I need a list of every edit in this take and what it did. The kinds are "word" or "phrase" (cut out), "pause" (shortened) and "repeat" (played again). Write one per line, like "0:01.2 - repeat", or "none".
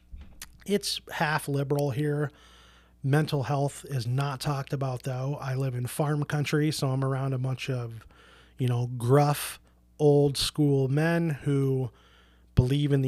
none